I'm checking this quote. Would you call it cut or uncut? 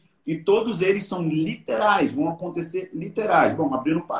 uncut